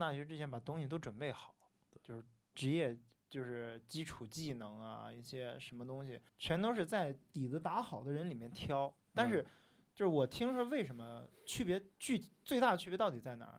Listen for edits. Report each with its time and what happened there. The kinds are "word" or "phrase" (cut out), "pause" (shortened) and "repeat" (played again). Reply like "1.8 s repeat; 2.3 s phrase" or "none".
6.3 s pause